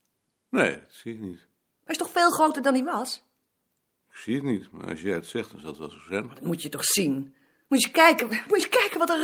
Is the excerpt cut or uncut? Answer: uncut